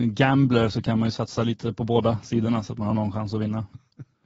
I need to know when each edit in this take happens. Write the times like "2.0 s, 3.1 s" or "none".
none